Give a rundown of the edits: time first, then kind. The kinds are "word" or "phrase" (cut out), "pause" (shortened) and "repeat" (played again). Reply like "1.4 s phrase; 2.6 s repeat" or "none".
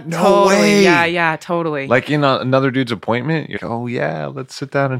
3.6 s word